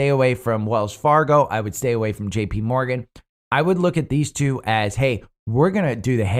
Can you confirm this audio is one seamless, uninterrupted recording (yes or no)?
yes